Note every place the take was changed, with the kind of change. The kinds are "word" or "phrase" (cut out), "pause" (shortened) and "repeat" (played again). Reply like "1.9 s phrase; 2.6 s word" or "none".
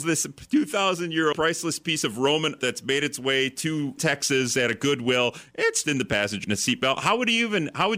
1.3 s word; 2.6 s word; 4.0 s word; 5.8 s word; 6.4 s word